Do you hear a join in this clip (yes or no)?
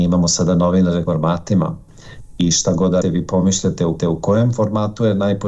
yes